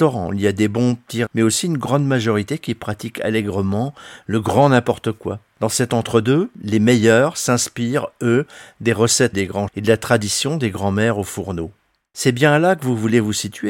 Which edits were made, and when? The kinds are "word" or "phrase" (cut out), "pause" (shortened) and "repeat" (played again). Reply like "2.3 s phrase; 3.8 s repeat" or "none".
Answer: 1.3 s word; 9.3 s word; 9.7 s word